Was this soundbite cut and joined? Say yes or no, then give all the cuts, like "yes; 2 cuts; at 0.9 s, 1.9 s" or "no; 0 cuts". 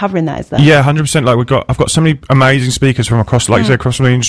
no; 0 cuts